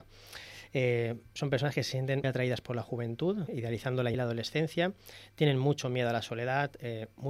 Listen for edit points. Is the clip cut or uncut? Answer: cut